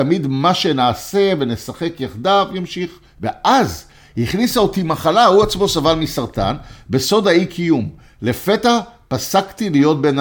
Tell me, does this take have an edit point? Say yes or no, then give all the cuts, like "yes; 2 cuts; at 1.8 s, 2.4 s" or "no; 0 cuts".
no; 0 cuts